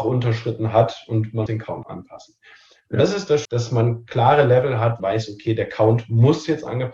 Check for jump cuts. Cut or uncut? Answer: cut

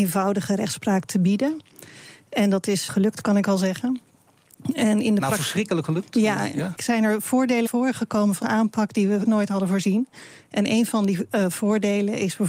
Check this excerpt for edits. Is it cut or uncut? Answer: cut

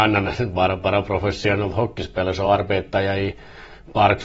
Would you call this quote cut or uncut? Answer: uncut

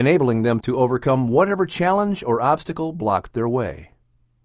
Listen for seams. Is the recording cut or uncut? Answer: uncut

